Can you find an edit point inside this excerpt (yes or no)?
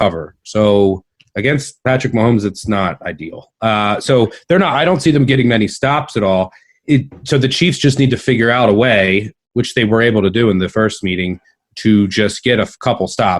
no